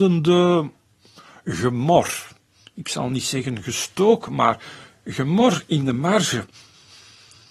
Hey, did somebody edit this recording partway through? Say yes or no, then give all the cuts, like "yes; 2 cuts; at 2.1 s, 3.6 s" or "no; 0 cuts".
no; 0 cuts